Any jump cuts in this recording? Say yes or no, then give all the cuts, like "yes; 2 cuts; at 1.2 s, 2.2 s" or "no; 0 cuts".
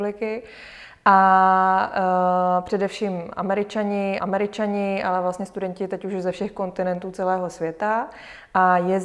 yes; 1 cut; at 4.2 s